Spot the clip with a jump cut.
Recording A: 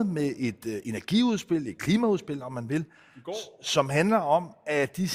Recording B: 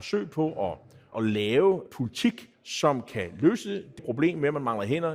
B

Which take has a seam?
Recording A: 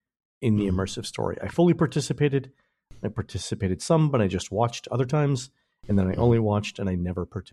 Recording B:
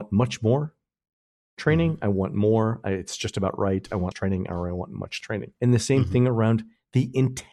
B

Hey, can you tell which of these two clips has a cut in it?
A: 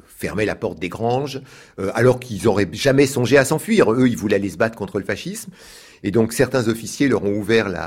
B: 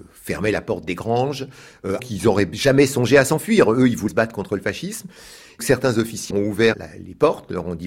B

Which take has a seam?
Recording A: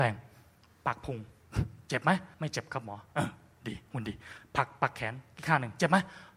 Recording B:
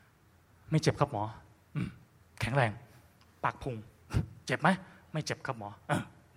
A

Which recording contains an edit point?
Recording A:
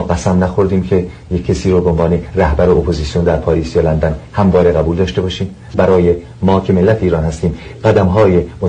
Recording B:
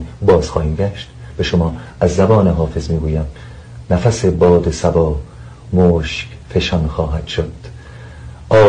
A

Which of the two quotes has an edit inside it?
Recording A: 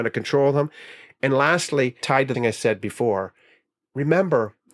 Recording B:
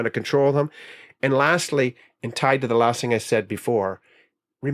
A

